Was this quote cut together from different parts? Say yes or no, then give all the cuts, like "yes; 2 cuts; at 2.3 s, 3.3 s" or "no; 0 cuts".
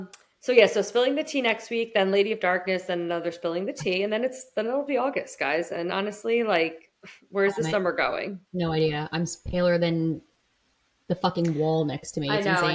yes; 1 cut; at 8.5 s